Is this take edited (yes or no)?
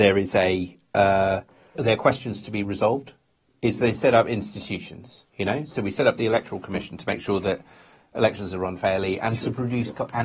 yes